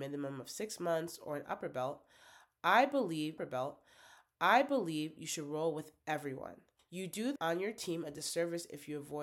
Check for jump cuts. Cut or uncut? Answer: cut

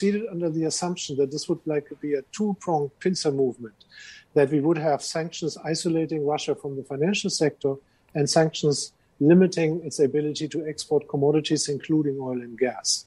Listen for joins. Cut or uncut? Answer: uncut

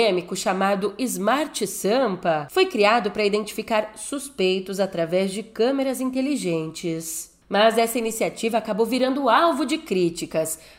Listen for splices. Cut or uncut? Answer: uncut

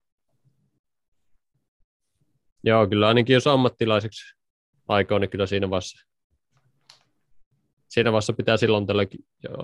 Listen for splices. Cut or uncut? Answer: uncut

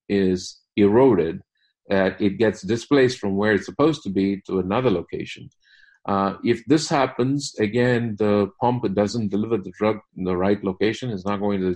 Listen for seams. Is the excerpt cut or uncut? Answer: uncut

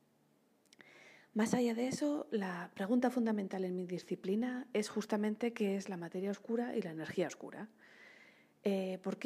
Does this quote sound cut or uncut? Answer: uncut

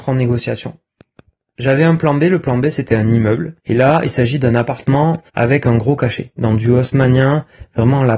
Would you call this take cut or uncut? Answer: cut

